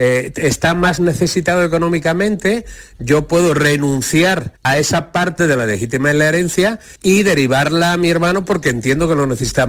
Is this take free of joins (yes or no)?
no